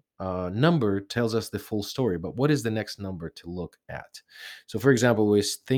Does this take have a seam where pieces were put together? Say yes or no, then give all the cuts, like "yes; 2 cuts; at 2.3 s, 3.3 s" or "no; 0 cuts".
no; 0 cuts